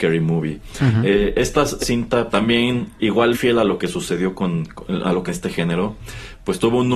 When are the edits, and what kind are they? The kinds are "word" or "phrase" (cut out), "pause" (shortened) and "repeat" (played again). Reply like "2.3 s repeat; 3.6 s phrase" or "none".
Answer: 1.8 s word; 2.3 s word; 3.3 s word; 5.3 s phrase

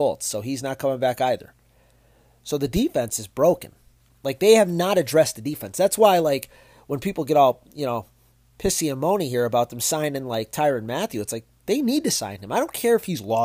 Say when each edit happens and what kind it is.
none

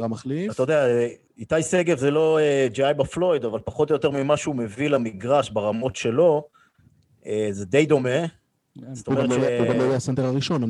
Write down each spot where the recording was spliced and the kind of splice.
1.3 s pause

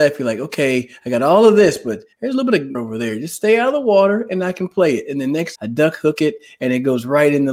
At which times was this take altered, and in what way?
2.1 s pause; 2.7 s word; 5.5 s phrase

